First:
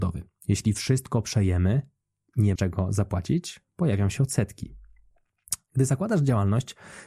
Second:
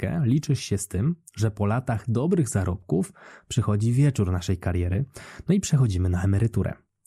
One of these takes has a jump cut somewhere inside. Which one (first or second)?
first